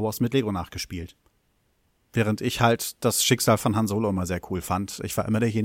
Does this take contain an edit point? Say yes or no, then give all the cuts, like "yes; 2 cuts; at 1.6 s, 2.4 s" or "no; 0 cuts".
no; 0 cuts